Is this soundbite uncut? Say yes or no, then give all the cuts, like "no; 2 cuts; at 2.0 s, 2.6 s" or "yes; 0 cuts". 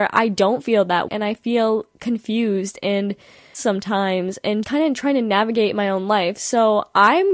no; 3 cuts; at 1.1 s, 3.5 s, 4.6 s